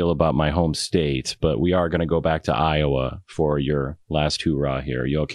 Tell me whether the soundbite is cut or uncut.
cut